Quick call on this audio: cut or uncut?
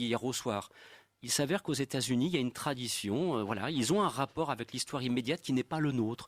uncut